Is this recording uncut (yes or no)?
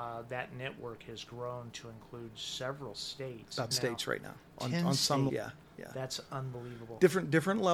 no